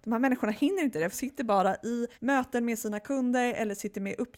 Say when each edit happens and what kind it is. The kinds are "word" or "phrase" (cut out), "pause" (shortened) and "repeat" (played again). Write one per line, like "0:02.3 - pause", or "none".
0:01.1 - word
0:02.1 - pause